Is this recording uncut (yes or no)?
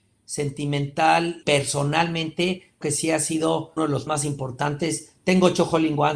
no